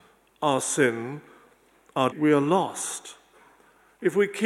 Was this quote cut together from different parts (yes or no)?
yes